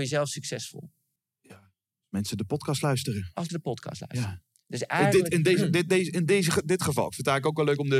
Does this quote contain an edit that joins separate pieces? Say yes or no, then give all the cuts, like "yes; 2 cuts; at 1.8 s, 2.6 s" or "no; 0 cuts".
yes; 2 cuts; at 1.2 s, 3.5 s